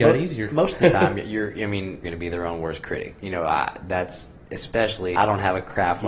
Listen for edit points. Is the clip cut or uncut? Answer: cut